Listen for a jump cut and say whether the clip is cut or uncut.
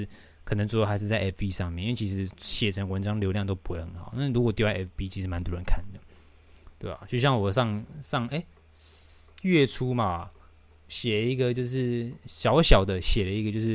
uncut